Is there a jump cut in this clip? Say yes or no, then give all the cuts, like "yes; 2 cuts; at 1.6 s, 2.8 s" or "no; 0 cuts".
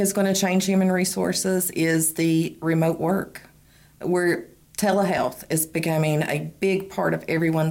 no; 0 cuts